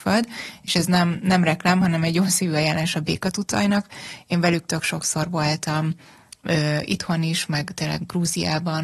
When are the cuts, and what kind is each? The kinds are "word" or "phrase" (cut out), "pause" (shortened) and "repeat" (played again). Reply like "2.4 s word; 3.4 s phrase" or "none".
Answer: none